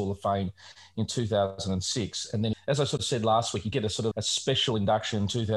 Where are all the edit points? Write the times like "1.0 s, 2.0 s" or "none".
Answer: 2.5 s, 3.0 s, 3.7 s, 4.1 s